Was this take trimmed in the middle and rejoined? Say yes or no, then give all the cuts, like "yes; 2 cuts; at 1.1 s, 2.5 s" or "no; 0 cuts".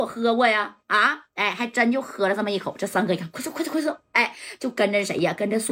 no; 0 cuts